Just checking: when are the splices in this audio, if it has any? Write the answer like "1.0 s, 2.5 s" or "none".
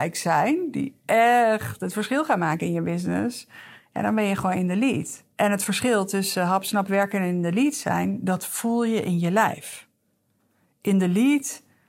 5.3 s